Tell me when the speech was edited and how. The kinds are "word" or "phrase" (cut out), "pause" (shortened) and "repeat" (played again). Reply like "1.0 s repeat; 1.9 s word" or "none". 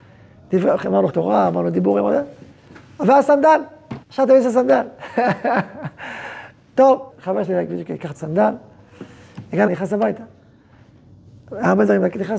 1.1 s word; 4.0 s pause; 7.1 s word; 8.1 s word; 9.7 s word